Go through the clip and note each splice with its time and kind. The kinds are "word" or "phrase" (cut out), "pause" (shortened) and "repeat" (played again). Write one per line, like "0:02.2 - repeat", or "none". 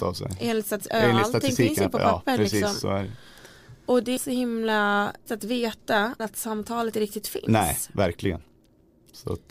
0:04.2 - word
0:05.3 - word
0:06.2 - word
0:06.9 - word